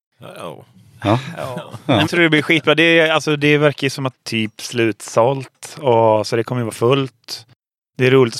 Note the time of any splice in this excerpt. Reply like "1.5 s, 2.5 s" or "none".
2.1 s, 4.1 s